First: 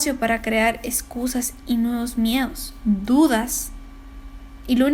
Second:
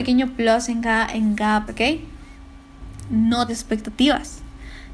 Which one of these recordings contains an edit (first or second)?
second